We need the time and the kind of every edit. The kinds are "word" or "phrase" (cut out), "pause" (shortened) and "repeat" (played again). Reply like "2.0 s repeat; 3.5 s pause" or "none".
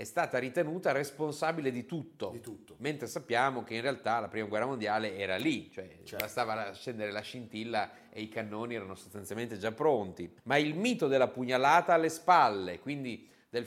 10.4 s pause